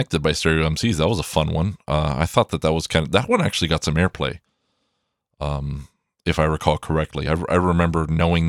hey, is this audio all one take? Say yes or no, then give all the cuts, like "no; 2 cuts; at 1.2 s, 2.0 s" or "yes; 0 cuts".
yes; 0 cuts